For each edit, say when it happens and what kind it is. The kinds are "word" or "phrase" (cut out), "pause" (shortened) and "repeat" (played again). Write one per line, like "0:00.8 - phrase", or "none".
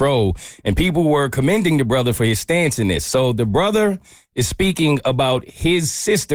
none